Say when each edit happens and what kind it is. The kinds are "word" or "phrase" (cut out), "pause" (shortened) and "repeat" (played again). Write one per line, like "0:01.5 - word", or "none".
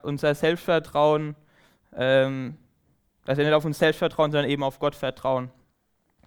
none